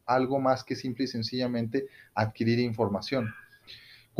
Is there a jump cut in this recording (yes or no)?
no